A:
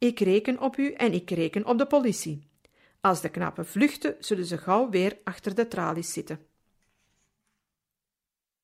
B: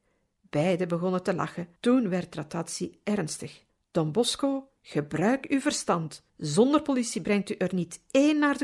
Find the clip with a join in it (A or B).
B